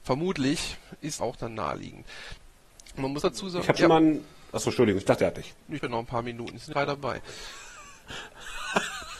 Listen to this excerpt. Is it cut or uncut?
cut